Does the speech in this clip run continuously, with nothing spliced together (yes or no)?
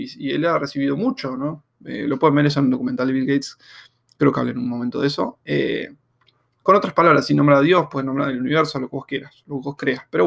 yes